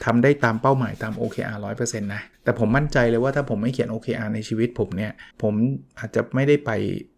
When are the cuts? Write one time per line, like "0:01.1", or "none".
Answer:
0:02.3
0:05.3